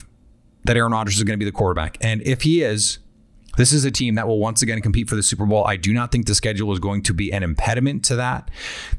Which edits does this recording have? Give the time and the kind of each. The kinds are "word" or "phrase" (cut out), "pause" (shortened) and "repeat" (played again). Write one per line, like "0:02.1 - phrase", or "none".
none